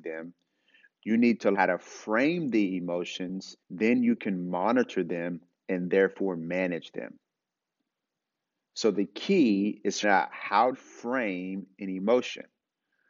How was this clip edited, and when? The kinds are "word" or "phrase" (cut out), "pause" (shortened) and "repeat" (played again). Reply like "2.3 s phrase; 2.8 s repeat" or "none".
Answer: 1.5 s word; 3.6 s pause; 10.0 s word; 10.7 s word

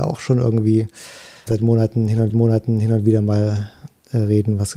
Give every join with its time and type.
1.5 s word; 2.3 s repeat

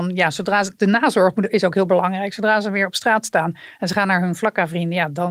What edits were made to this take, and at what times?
none

